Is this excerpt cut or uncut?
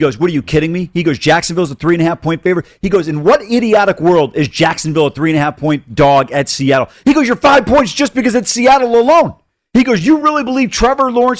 uncut